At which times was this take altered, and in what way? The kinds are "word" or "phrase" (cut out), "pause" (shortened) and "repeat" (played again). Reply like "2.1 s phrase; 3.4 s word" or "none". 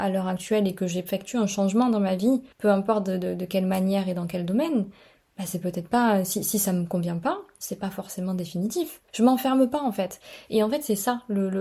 2.5 s pause; 9.1 s pause